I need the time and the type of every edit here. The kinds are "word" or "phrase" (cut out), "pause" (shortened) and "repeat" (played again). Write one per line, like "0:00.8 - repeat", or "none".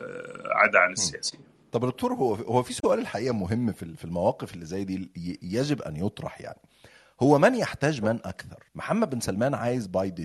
0:08.7 - pause